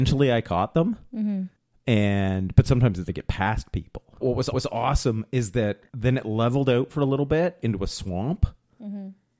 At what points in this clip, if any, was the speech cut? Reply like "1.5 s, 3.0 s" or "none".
3.1 s, 4.2 s, 4.5 s, 5.9 s